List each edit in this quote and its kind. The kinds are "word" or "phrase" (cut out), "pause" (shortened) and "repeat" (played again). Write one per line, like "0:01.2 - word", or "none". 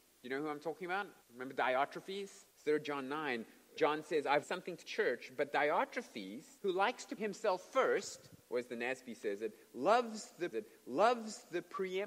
0:01.2 - pause
0:02.5 - pause
0:03.8 - word
0:04.4 - word
0:04.8 - word
0:06.6 - pause
0:07.2 - word
0:08.4 - pause
0:10.5 - repeat